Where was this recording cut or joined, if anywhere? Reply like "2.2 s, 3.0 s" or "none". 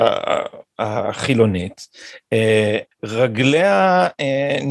2.9 s